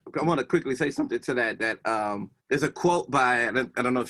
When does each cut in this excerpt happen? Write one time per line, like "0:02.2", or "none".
0:02.4